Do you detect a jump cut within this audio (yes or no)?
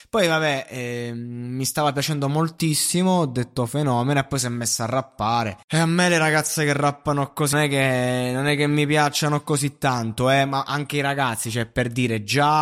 yes